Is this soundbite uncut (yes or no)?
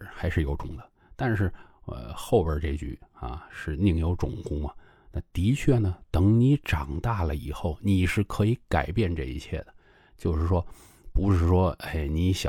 yes